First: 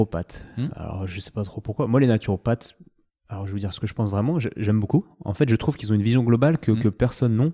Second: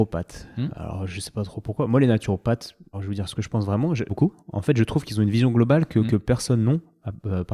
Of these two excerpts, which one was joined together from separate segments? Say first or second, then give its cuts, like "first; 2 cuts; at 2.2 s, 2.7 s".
second; 2 cuts; at 2.9 s, 4.1 s